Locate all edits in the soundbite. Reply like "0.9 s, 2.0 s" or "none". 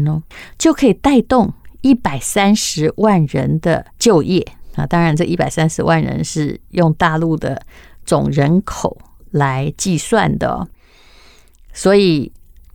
3.9 s